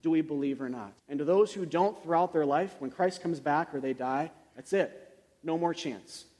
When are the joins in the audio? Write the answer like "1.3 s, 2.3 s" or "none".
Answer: 1.0 s